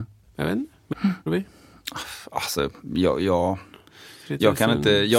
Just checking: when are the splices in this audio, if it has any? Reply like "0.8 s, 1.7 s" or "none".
0.9 s, 1.3 s